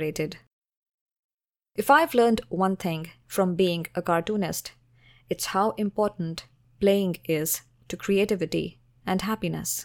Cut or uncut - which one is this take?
uncut